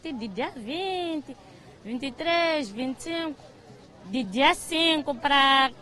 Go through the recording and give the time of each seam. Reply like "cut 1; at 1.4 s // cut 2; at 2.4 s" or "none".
cut 1; at 4.2 s